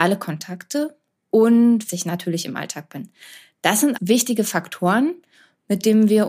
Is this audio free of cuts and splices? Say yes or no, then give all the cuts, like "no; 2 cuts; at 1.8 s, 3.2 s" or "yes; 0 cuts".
no; 2 cuts; at 1.9 s, 4.0 s